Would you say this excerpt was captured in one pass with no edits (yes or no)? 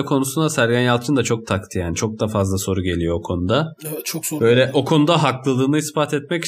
yes